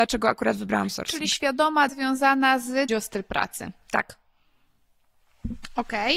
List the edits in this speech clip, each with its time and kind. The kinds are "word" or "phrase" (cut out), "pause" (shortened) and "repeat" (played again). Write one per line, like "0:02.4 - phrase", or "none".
0:01.9 - word
0:02.9 - phrase